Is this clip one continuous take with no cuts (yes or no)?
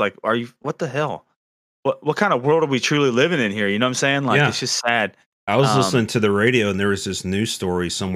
yes